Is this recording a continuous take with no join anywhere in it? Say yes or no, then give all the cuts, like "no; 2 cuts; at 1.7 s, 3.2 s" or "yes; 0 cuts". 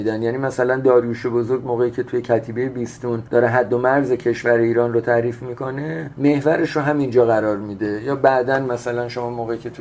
yes; 0 cuts